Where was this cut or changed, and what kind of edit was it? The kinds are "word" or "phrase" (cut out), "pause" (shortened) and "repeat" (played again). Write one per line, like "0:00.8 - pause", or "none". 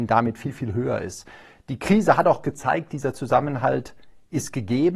none

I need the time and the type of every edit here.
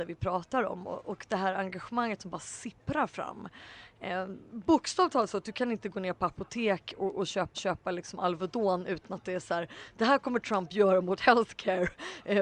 0:07.5 - repeat

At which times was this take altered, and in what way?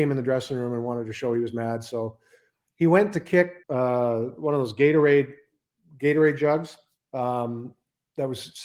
0:03.6 - pause
0:07.0 - pause

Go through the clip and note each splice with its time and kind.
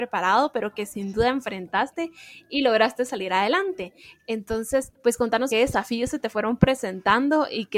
0:04.9 - pause
0:05.5 - phrase

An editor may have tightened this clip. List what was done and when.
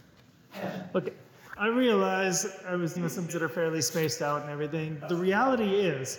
0:01.6 - word
0:03.0 - word
0:03.3 - word
0:05.0 - word

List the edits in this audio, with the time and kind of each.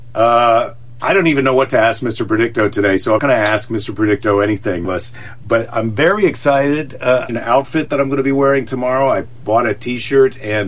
0:03.2 - word
0:04.8 - phrase
0:07.3 - phrase

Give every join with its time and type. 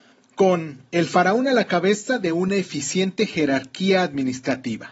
none

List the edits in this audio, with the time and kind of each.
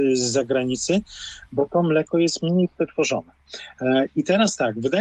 none

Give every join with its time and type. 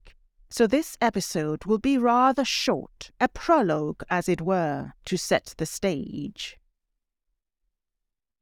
0:03.2 - pause
0:05.0 - pause

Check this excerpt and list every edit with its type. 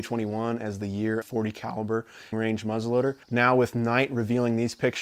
0:01.2 - phrase
0:02.3 - phrase
0:03.2 - pause

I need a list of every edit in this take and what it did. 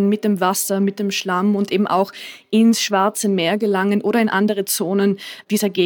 none

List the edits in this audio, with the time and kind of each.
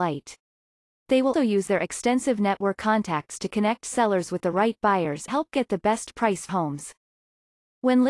0:01.3 - word
0:02.8 - word
0:05.3 - word
0:06.5 - word

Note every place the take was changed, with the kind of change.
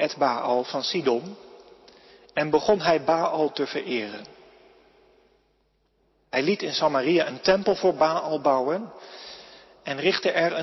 none

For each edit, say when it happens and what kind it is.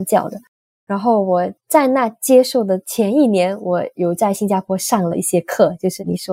0:01.6 - pause

